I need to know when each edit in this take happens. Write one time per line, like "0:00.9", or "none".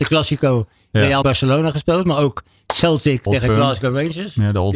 0:01.2
0:03.3